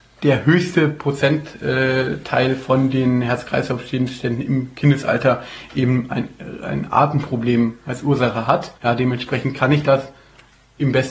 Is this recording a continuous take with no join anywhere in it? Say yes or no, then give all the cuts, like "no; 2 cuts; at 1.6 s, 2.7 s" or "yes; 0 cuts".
no; 1 cut; at 8.8 s